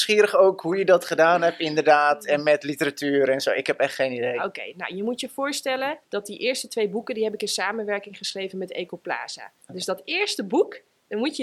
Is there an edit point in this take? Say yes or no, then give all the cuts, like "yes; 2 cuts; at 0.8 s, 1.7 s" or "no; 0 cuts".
yes; 2 cuts; at 6.0 s, 9.6 s